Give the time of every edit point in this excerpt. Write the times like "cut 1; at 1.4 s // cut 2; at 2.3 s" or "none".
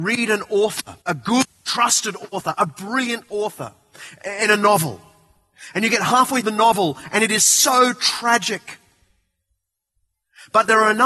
cut 1; at 1.0 s // cut 2; at 6.4 s